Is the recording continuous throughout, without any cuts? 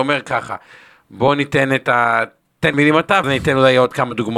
no; 2 cuts; at 2.7 s, 3.2 s

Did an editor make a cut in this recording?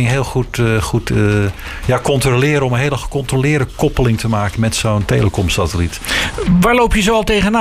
no; 0 cuts

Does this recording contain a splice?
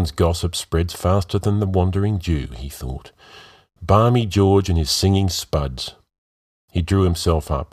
no; 0 cuts

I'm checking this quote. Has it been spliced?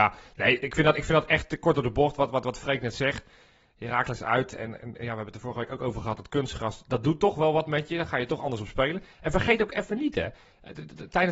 no; 0 cuts

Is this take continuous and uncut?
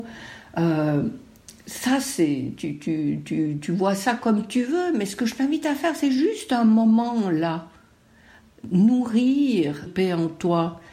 no; 1 cut; at 9.9 s

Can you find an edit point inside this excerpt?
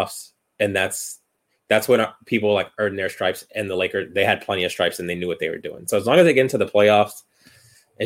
no; 0 cuts

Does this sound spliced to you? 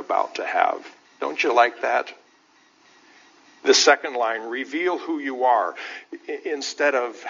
no; 0 cuts

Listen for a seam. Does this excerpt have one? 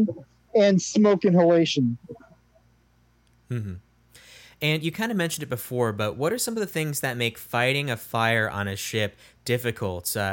no; 0 cuts

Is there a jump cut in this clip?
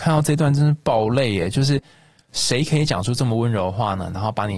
no; 0 cuts

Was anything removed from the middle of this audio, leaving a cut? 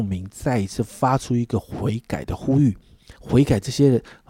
yes; 1 cut; at 3.2 s

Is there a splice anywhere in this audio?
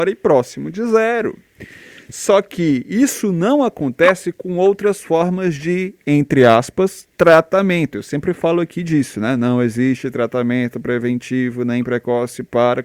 no; 0 cuts

